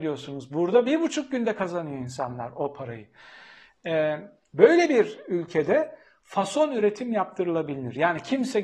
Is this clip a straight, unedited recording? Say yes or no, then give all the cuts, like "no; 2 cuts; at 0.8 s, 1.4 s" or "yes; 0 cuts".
yes; 0 cuts